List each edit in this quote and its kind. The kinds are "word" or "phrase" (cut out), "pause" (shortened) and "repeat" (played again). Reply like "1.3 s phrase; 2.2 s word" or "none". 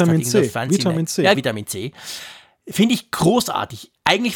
1.3 s word